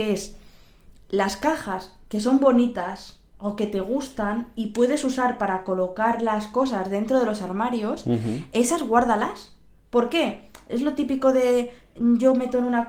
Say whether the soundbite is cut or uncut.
uncut